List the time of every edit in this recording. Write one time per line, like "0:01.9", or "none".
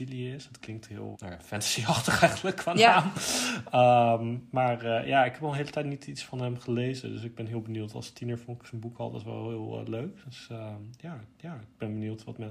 0:01.1
0:11.4